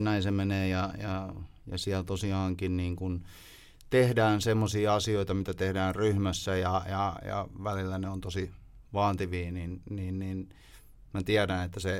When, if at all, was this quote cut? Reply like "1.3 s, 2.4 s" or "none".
none